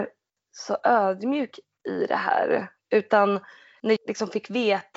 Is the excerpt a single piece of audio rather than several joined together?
no; 1 cut; at 4.0 s

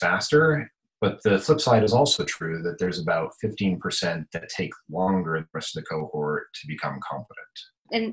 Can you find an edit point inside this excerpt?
no; 0 cuts

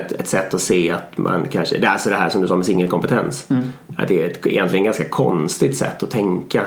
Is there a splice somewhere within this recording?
no; 0 cuts

